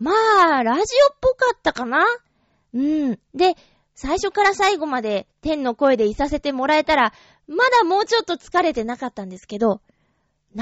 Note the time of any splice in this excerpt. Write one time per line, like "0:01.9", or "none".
none